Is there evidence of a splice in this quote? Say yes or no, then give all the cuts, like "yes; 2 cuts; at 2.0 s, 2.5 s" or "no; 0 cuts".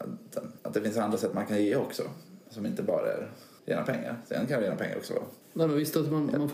yes; 2 cuts; at 3.6 s, 5.4 s